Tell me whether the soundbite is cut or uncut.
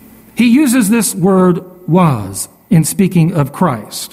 uncut